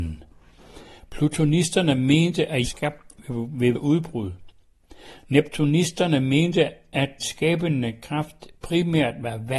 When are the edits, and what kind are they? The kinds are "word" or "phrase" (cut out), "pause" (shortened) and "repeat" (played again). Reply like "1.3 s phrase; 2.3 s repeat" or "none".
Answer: 2.6 s phrase; 3.7 s word; 7.2 s word